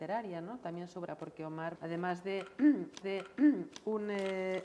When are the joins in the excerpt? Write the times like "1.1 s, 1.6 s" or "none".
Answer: 1.1 s, 1.8 s, 3.0 s